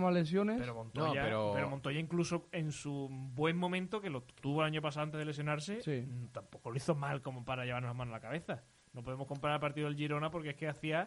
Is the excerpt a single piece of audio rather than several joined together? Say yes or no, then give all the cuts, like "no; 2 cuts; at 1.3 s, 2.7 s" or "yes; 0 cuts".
no; 1 cut; at 4.4 s